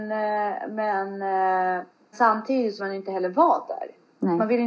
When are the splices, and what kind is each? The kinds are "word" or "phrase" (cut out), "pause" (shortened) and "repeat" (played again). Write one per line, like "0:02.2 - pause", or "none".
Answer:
0:02.1 - word
0:02.8 - word